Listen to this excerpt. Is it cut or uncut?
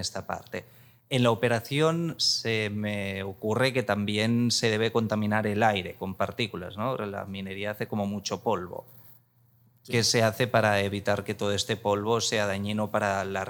uncut